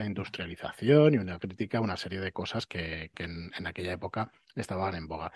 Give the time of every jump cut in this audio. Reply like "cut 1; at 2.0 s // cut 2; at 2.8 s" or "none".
cut 1; at 3.1 s